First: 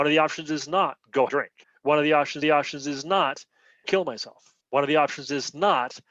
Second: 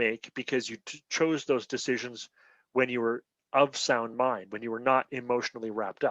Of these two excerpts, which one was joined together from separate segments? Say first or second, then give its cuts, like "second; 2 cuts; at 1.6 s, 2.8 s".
first; 5 cuts; at 1.3 s, 1.6 s, 2.4 s, 3.8 s, 4.6 s